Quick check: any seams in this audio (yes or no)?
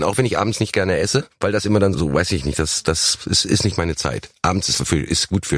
yes